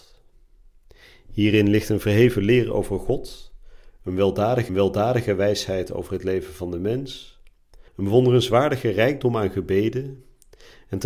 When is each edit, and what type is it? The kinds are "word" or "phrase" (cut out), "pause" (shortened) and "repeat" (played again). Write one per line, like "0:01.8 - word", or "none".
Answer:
0:04.7 - repeat
0:07.9 - pause